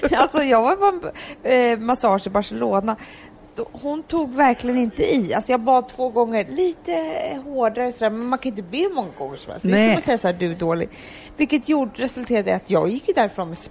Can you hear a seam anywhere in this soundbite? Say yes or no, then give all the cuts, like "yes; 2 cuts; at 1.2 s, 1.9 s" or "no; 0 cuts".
no; 0 cuts